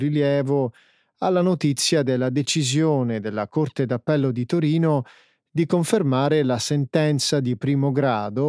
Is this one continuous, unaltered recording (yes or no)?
yes